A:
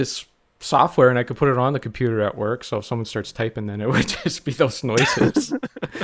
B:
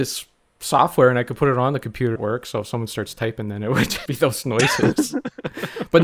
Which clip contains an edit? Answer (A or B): B